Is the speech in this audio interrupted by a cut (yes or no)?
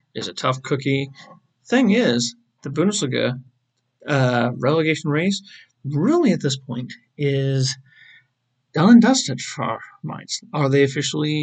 no